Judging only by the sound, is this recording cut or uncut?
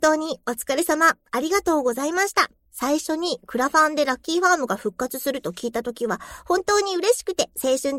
cut